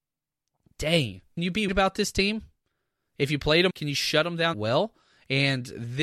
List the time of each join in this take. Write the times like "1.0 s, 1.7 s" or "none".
1.4 s, 1.7 s, 3.7 s, 4.5 s